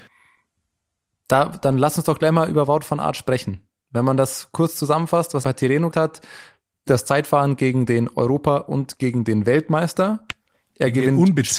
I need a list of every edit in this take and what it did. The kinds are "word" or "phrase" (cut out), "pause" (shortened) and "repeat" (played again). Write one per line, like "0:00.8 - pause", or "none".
0:05.4 - word
0:05.9 - word
0:06.9 - word